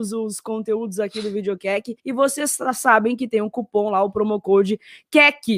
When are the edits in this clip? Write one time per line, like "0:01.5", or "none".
0:02.0